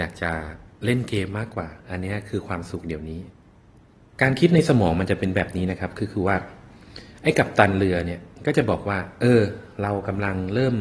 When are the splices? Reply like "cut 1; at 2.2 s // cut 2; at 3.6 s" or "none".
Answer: cut 1; at 1.8 s // cut 2; at 3.5 s